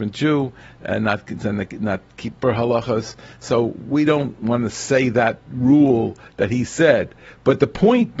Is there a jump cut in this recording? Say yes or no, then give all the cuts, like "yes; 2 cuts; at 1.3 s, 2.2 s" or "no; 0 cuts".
yes; 1 cut; at 2.3 s